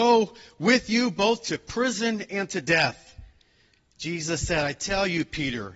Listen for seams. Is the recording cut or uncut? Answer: uncut